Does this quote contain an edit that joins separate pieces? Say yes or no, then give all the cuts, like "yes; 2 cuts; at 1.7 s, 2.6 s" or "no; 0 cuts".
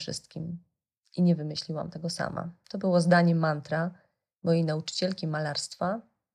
no; 0 cuts